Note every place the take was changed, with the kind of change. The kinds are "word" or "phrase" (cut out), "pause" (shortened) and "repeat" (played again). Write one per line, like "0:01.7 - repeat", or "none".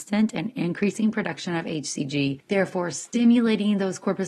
none